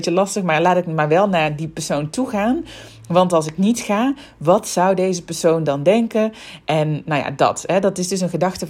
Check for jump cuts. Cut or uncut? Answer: uncut